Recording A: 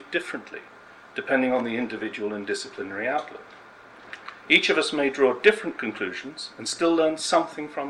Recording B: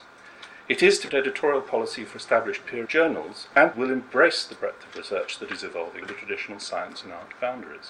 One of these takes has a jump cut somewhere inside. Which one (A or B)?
B